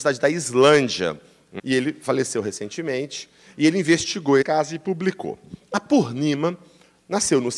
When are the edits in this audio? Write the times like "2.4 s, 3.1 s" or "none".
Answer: 1.6 s, 4.4 s